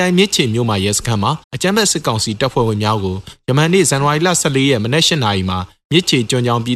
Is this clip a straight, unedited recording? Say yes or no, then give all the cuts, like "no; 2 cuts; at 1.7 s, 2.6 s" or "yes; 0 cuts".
no; 1 cut; at 1.4 s